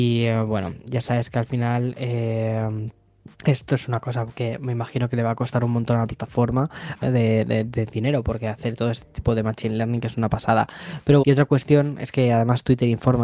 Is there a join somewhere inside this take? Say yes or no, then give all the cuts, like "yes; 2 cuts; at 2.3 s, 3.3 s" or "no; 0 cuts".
yes; 3 cuts; at 3.3 s, 7.0 s, 11.2 s